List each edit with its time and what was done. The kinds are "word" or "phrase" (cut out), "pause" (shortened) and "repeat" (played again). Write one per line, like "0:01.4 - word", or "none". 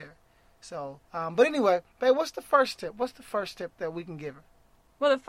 0:01.0 - pause